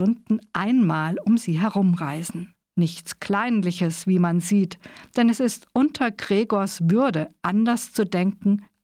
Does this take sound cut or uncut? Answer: cut